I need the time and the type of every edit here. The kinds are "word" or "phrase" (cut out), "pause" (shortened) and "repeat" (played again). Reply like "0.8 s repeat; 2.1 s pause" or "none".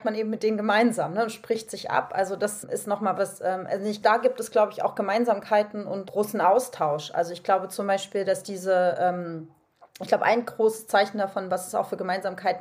3.1 s word